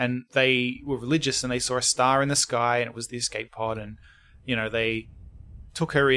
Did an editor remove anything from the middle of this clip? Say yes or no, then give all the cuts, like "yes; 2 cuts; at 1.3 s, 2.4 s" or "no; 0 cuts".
no; 0 cuts